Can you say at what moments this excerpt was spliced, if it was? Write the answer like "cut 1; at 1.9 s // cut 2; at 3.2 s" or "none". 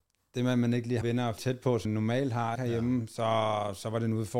cut 1; at 1.0 s // cut 2; at 1.4 s // cut 3; at 1.8 s // cut 4; at 2.5 s